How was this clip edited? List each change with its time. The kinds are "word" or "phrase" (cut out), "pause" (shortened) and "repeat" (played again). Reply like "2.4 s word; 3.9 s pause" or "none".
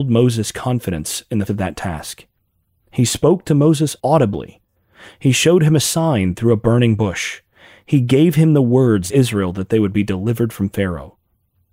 1.5 s word; 4.0 s pause; 9.1 s phrase